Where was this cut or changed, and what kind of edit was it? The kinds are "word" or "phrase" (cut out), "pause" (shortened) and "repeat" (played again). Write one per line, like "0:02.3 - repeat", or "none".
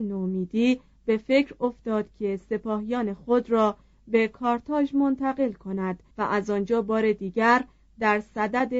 0:06.1 - pause